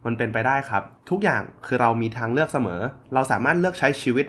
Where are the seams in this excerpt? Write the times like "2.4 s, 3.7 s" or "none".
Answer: 1.0 s

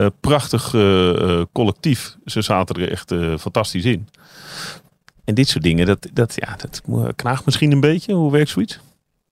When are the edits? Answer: none

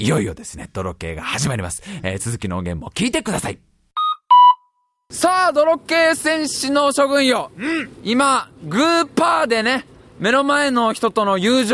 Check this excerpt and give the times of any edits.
none

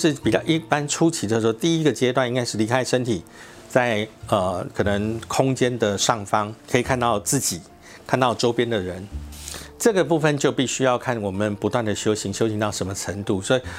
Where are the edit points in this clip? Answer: 6.6 s

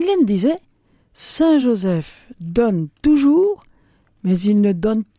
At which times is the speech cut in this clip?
none

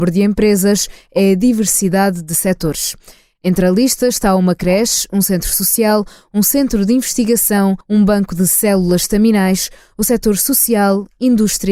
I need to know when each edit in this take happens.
7.8 s

